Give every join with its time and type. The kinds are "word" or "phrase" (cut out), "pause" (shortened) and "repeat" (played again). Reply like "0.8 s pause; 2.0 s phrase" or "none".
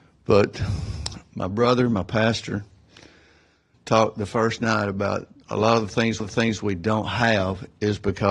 3.7 s word; 5.3 s pause; 6.2 s repeat